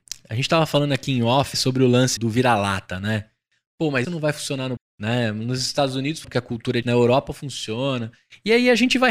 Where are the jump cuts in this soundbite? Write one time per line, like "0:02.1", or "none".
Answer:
0:01.5
0:02.2
0:04.0
0:04.8
0:06.2
0:06.8